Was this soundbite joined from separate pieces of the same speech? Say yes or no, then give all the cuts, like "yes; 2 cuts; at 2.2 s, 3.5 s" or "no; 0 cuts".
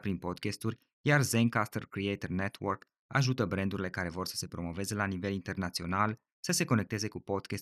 no; 0 cuts